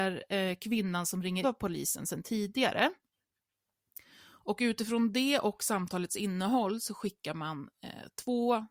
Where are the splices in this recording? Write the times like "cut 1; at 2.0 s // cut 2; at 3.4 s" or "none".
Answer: cut 1; at 1.4 s